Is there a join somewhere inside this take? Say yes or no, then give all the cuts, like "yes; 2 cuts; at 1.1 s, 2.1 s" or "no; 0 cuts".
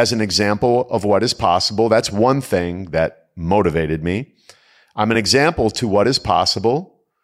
no; 0 cuts